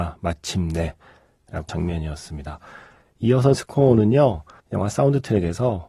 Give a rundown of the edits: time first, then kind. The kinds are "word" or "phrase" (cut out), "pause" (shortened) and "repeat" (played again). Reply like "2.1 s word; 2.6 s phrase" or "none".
1.7 s phrase; 3.5 s word; 4.6 s pause